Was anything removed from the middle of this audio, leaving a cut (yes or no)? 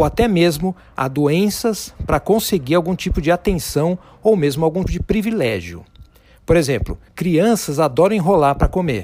yes